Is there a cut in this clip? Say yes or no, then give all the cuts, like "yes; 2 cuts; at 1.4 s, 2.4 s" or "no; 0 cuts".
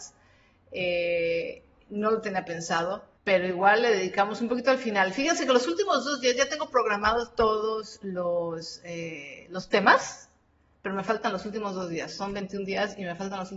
yes; 1 cut; at 3.2 s